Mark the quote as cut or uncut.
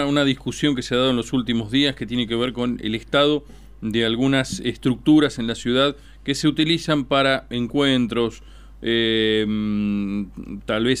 uncut